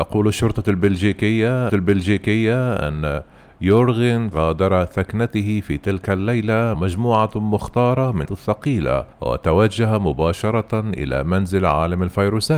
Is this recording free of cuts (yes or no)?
no